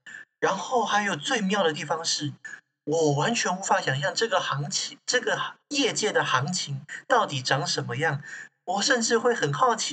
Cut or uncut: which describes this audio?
cut